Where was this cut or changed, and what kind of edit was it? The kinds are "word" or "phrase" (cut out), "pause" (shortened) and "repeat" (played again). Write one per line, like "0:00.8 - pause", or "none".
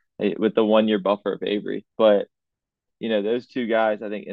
0:01.9 - pause